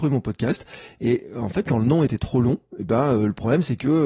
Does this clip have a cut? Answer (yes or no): no